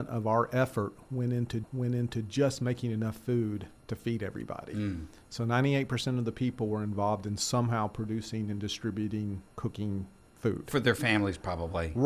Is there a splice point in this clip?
yes; 2 cuts; at 1.6 s, 9.5 s

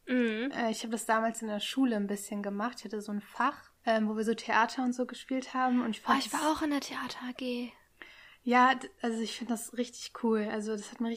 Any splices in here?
yes; 1 cut; at 3.8 s

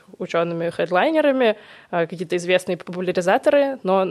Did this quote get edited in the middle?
no; 0 cuts

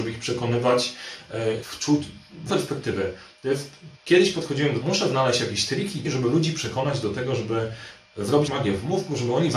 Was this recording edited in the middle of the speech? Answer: yes; 6 cuts; at 1.6 s, 2.5 s, 4.0 s, 4.8 s, 6.0 s, 8.5 s

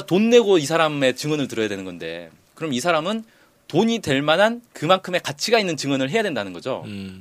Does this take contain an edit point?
yes; 1 cut; at 4.7 s

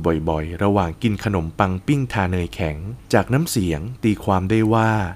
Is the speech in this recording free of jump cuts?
no; 1 cut; at 3.0 s

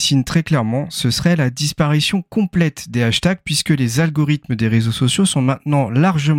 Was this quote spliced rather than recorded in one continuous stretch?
no; 0 cuts

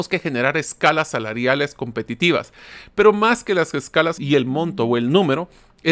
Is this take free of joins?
no; 1 cut; at 4.2 s

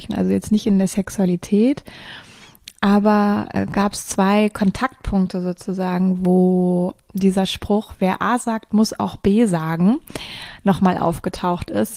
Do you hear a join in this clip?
no; 0 cuts

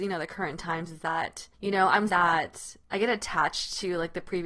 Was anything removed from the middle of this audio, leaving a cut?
yes; 2 cuts; at 1.5 s, 2.1 s

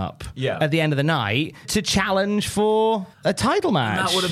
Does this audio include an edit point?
yes; 2 cuts; at 1.6 s, 3.1 s

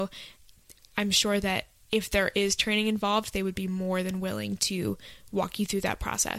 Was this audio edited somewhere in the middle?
no; 0 cuts

